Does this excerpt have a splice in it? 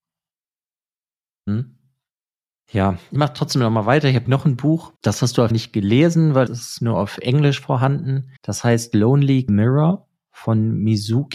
yes; 7 cuts; at 3.2 s, 4.3 s, 5.0 s, 5.5 s, 6.5 s, 8.4 s, 9.5 s

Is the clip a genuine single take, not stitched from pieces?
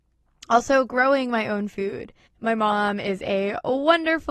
no; 1 cut; at 2.3 s

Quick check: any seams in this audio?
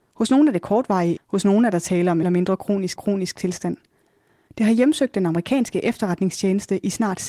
yes; 3 cuts; at 1.2 s, 2.2 s, 3.0 s

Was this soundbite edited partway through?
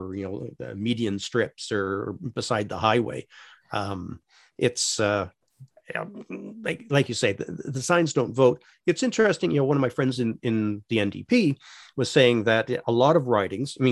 no; 0 cuts

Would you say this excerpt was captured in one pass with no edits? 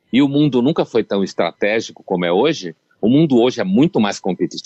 yes; 0 cuts

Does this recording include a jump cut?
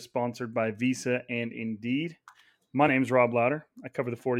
no; 0 cuts

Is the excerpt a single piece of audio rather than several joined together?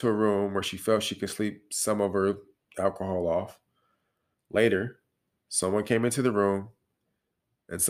yes; 0 cuts

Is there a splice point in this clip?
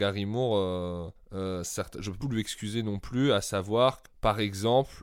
yes; 3 cuts; at 1.2 s, 2.2 s, 4.1 s

